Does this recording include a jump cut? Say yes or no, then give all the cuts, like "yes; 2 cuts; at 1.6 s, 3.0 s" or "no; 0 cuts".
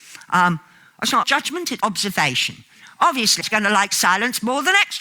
yes; 3 cuts; at 1.2 s, 1.8 s, 3.4 s